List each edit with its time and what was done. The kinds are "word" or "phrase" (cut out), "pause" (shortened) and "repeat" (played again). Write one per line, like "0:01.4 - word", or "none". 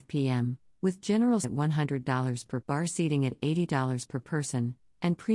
0:01.4 - word
0:02.6 - word